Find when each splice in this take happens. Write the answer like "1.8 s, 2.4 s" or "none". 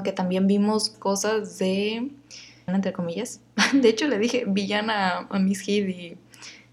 0.9 s, 2.7 s